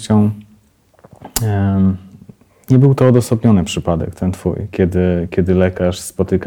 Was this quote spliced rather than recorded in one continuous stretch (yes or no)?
no